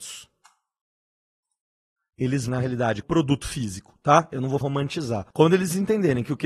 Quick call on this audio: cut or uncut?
cut